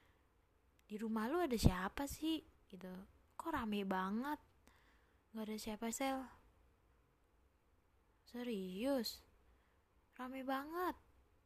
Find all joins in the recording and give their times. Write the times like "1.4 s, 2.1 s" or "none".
2.5 s, 5.3 s, 5.9 s